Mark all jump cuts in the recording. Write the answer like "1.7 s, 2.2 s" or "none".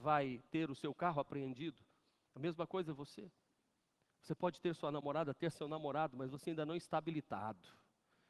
none